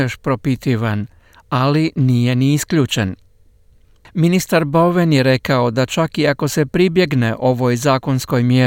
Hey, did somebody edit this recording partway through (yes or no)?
no